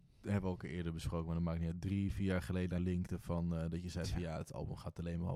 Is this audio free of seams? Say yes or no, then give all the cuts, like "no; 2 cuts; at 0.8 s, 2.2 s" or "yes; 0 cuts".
no; 1 cut; at 2.8 s